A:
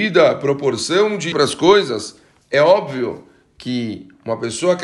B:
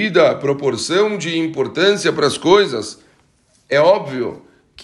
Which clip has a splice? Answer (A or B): A